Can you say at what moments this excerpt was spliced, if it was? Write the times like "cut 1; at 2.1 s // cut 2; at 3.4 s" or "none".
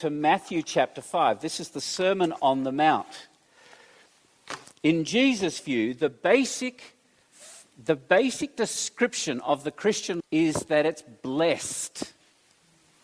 cut 1; at 10.2 s